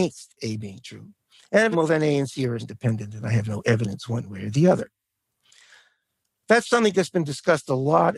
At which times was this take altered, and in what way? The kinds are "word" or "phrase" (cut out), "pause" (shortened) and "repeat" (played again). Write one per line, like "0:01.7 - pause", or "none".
0:01.7 - phrase
0:02.6 - word

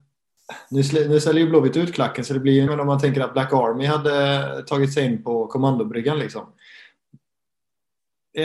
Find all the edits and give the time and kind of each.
0:02.7 - word

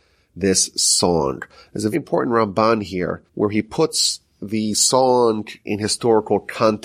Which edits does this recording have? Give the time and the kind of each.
0:01.9 - word
0:03.3 - pause
0:05.6 - word

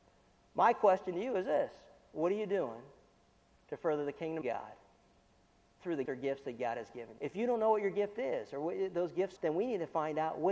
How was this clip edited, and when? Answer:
0:04.4 - word
0:06.1 - word
0:07.2 - word
0:09.4 - word

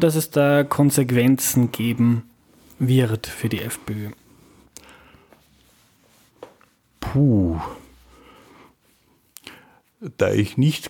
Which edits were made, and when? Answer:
none

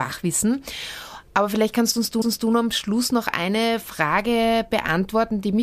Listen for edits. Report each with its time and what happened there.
0:02.2 - repeat

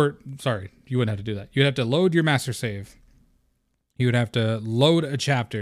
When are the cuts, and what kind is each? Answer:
none

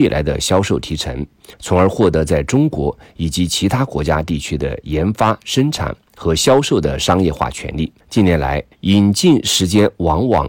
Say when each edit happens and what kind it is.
0:01.5 - pause
0:08.0 - pause
0:08.7 - pause

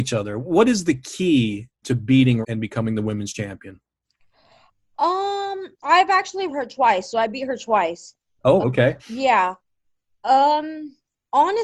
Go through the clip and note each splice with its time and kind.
0:01.8 - phrase
0:02.4 - word
0:05.8 - word
0:06.5 - word
0:08.6 - word
0:09.0 - pause

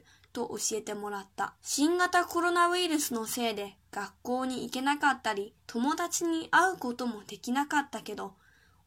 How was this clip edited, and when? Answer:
0:01.6 - pause
0:05.6 - pause

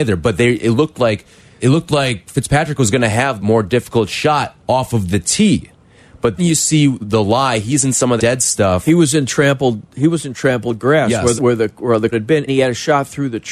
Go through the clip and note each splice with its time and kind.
0:01.6 - word
0:03.4 - word
0:06.4 - word
0:08.2 - word
0:11.4 - word
0:12.1 - word
0:12.5 - word

